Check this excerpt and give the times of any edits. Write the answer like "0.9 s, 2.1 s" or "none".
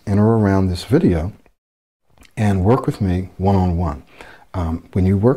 none